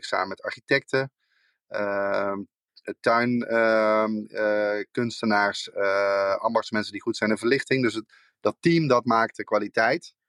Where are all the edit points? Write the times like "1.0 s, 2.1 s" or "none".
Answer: none